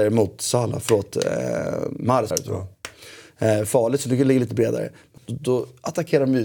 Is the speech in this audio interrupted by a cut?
yes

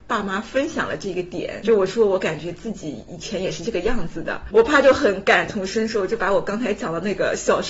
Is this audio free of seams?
no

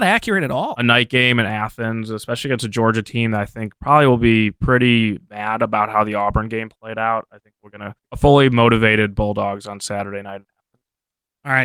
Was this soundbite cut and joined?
yes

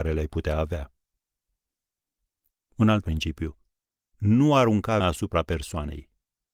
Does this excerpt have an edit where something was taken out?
yes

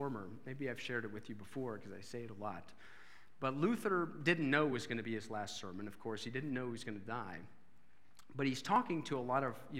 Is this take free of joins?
yes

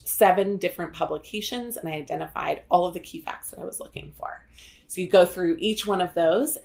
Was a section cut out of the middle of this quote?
no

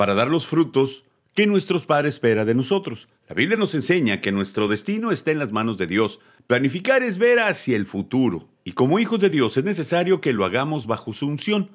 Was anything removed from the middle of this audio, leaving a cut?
no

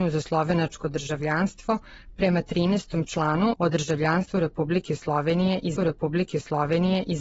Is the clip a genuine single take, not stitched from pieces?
no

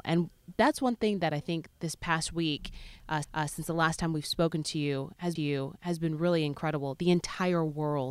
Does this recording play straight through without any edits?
no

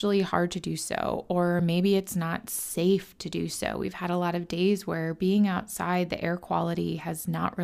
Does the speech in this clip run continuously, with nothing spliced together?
yes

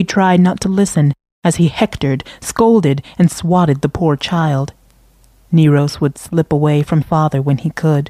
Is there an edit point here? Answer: yes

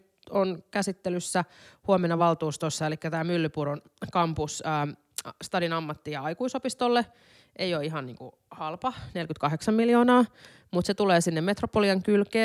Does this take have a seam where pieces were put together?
no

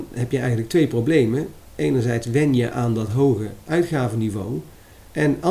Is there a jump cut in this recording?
no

